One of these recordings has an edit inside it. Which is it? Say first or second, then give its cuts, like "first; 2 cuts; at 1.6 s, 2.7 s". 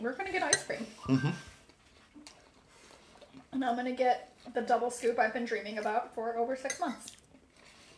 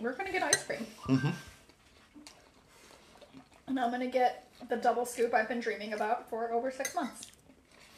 first; 1 cut; at 3.4 s